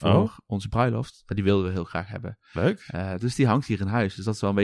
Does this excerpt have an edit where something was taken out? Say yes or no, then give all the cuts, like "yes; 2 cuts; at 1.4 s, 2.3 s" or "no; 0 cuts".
no; 0 cuts